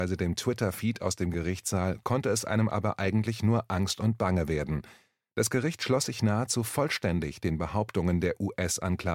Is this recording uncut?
yes; 0 cuts

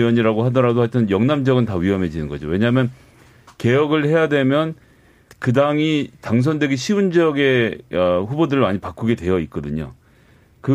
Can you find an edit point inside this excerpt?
yes; 1 cut; at 5.3 s

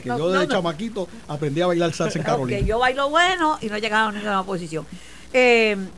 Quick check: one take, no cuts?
yes; 0 cuts

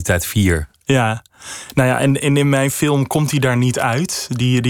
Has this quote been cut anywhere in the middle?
no; 0 cuts

